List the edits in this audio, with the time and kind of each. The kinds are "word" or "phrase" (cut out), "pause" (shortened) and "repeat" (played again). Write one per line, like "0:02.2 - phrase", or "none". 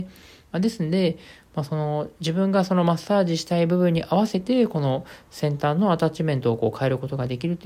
none